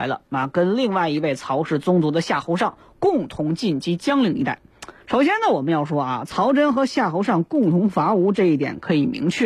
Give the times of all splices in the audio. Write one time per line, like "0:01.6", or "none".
0:05.0